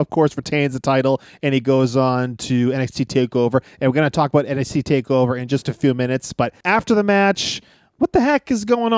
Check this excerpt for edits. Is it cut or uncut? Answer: cut